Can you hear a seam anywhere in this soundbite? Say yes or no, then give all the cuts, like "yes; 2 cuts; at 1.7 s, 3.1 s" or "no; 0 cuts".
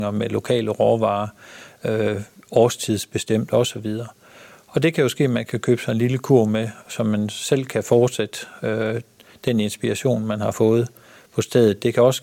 no; 0 cuts